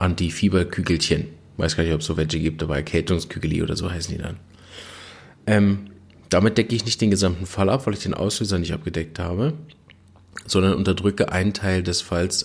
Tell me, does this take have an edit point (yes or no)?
no